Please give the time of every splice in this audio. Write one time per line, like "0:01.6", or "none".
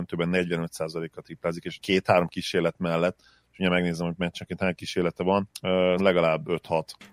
0:01.8
0:06.0